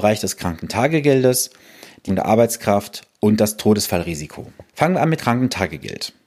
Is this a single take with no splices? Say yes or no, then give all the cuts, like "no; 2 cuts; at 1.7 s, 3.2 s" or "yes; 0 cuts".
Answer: no; 3 cuts; at 2.1 s, 4.7 s, 5.2 s